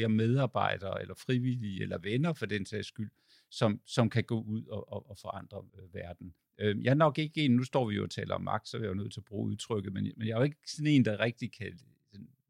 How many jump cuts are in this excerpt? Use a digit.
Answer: 2